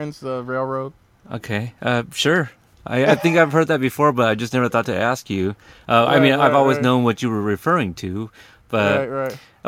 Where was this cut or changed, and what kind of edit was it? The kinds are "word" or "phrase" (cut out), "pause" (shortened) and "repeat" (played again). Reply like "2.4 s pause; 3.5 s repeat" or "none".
1.1 s pause